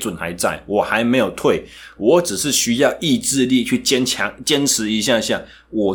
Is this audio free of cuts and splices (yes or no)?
yes